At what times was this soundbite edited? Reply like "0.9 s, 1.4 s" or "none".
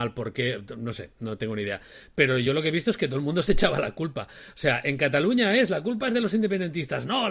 none